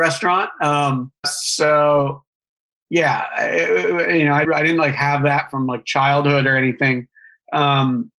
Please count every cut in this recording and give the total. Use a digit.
2